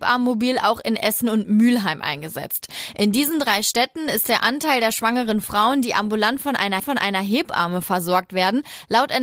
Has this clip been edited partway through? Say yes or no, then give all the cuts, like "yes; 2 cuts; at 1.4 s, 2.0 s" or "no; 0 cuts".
yes; 1 cut; at 6.8 s